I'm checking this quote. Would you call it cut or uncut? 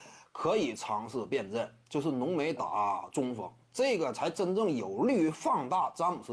uncut